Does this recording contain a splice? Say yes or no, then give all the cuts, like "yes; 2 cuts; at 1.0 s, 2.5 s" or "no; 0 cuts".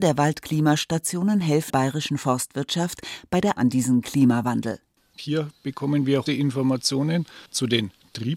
yes; 5 cuts; at 1.7 s, 3.6 s, 5.0 s, 6.3 s, 7.5 s